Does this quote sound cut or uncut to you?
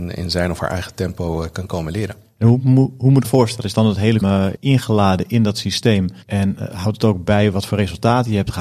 cut